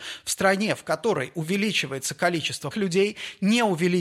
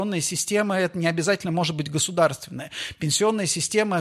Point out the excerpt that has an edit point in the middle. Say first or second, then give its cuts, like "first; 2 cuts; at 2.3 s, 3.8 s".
first; 1 cut; at 2.7 s